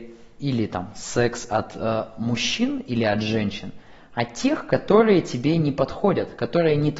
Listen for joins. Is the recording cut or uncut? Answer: uncut